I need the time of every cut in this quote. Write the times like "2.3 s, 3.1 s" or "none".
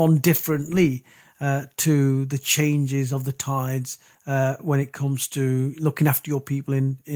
none